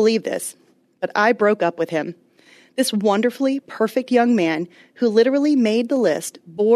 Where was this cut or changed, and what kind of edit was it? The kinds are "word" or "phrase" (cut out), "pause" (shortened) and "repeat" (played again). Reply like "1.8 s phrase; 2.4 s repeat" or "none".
none